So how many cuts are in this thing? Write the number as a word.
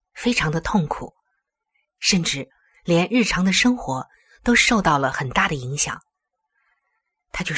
zero